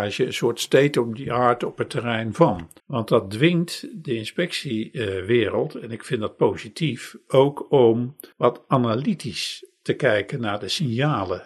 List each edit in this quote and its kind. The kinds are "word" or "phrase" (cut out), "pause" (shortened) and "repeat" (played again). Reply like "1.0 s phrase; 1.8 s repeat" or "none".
2.8 s pause; 8.3 s pause